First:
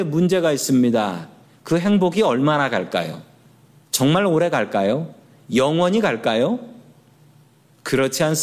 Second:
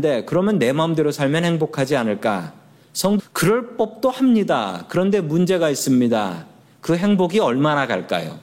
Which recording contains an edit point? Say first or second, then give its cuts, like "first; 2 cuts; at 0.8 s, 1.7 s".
second; 1 cut; at 3.2 s